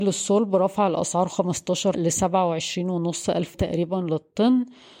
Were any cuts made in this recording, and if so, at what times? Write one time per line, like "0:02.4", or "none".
0:01.9
0:03.5